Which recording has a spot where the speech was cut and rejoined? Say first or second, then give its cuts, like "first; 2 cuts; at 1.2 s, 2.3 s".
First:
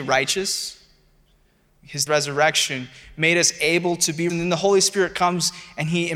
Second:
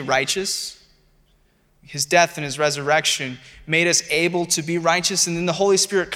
first; 2 cuts; at 2.1 s, 4.3 s